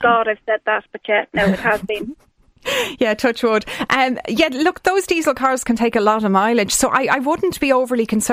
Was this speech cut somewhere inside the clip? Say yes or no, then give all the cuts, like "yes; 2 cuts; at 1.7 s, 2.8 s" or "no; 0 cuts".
no; 0 cuts